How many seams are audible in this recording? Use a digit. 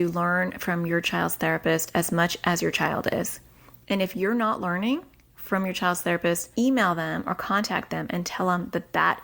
1